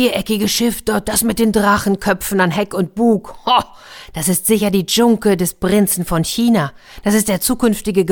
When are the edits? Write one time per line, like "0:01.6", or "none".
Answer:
0:01.0